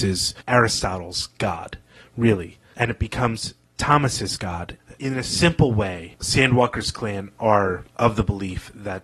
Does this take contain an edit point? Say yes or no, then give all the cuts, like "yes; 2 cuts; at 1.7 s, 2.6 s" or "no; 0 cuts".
no; 0 cuts